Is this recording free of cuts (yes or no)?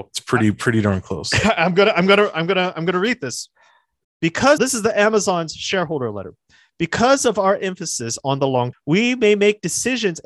no